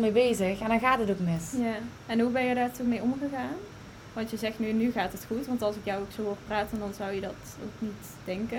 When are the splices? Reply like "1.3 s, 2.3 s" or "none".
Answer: none